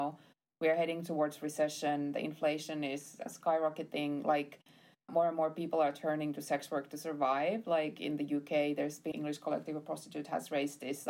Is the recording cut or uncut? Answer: cut